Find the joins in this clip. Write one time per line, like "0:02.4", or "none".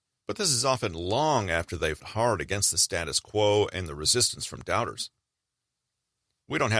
0:02.0

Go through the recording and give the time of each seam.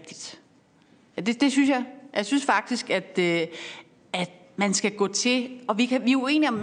none

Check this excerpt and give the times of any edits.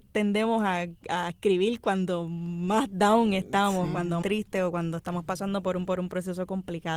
0:04.2
0:05.9

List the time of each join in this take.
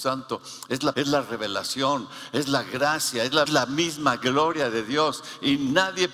0:00.9
0:03.5

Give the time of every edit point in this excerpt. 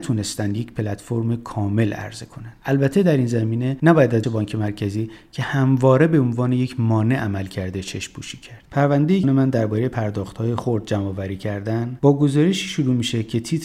0:04.2
0:08.7
0:09.2

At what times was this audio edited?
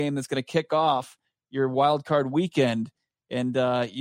none

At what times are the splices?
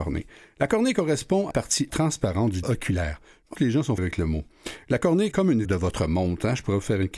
0:01.5
0:01.9
0:02.6
0:03.5
0:04.0
0:05.3
0:05.6

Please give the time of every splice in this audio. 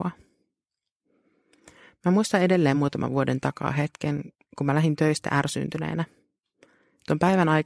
none

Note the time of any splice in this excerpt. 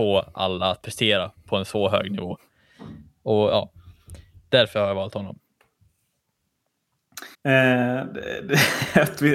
0:07.3

